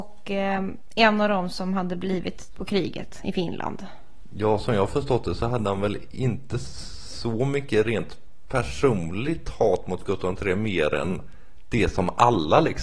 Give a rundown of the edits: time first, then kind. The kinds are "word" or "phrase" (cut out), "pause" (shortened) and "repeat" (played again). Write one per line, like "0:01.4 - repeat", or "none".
0:02.5 - word